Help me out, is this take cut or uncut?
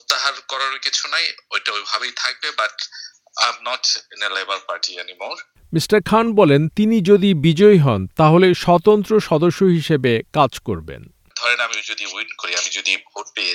uncut